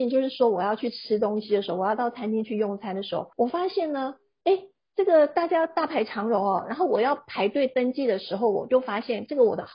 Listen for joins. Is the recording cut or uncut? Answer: cut